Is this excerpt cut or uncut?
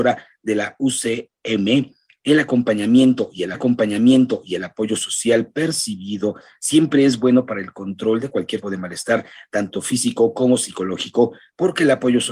cut